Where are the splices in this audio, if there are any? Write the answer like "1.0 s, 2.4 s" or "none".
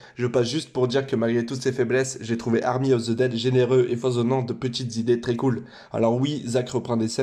none